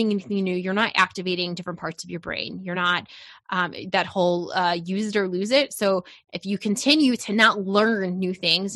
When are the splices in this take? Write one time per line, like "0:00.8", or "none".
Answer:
none